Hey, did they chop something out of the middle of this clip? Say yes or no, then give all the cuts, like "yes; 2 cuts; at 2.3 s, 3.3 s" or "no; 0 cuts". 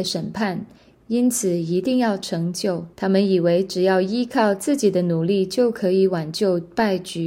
yes; 1 cut; at 2.9 s